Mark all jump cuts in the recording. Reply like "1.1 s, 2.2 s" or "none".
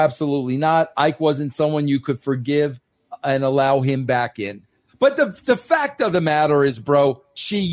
none